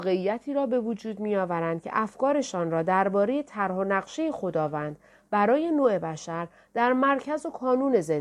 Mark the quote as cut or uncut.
uncut